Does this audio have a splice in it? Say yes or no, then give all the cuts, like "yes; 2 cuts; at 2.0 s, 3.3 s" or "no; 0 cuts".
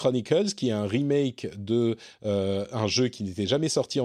no; 0 cuts